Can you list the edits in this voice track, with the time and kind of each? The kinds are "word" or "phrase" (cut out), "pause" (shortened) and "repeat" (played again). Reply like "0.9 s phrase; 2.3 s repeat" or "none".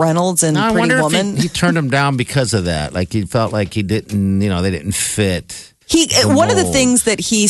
5.8 s pause